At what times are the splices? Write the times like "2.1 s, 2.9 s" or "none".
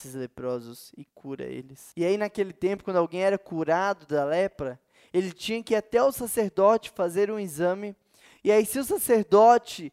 none